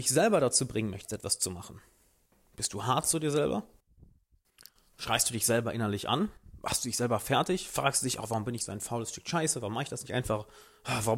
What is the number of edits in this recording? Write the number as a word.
zero